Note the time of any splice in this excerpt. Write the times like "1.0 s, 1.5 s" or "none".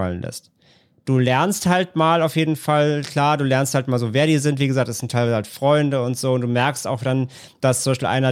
none

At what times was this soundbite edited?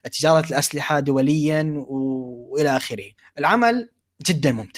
none

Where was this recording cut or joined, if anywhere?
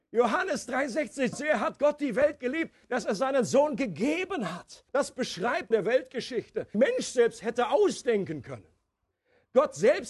1.3 s, 4.9 s, 5.7 s, 6.7 s

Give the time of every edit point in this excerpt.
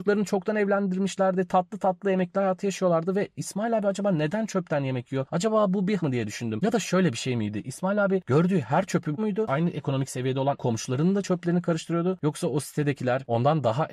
6.0 s, 9.2 s, 10.6 s

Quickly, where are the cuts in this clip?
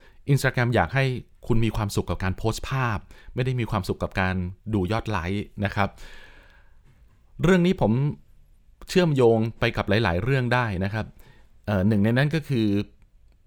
none

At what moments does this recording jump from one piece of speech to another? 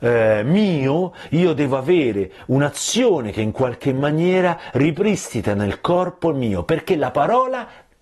none

